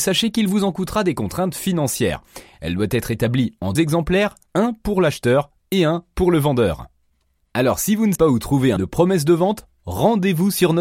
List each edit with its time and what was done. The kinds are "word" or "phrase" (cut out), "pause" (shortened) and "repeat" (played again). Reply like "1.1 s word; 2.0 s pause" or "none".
3.8 s word; 8.2 s word; 8.8 s word